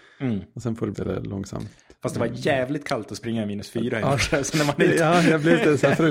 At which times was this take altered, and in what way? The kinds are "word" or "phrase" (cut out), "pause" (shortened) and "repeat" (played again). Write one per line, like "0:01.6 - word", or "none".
0:00.9 - phrase

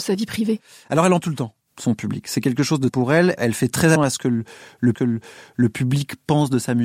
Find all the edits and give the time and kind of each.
0:01.2 - word
0:02.9 - phrase
0:04.0 - word
0:04.9 - repeat

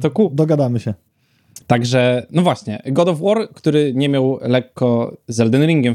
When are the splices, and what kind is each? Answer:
0:01.6 - pause

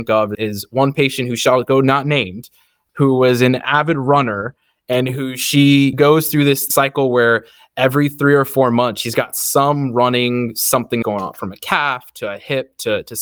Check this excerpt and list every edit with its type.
0:11.0 - word

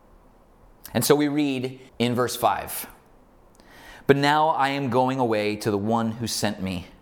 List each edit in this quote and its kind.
0:01.9 - pause

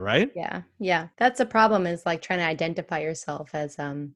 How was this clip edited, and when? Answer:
0:01.1 - pause

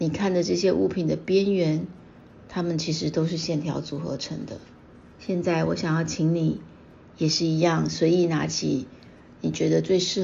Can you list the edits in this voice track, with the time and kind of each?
0:04.8 - pause

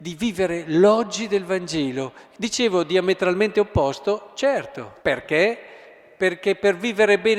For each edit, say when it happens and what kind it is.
0:05.0 - pause

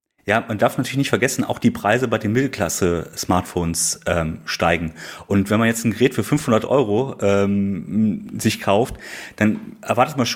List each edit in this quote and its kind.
none

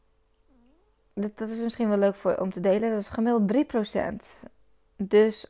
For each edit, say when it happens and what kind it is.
none

